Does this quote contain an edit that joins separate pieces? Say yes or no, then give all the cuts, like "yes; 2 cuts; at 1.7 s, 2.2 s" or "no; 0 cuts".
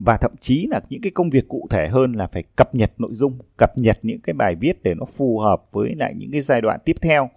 no; 0 cuts